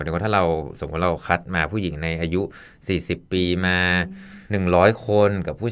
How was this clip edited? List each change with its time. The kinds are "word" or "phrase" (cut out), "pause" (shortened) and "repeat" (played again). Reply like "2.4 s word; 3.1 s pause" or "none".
none